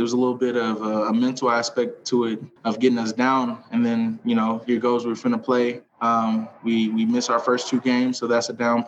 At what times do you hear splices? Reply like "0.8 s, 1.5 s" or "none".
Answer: 2.6 s, 5.9 s